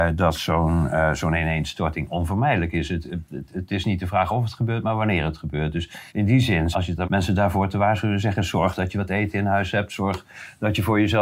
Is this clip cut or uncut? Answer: cut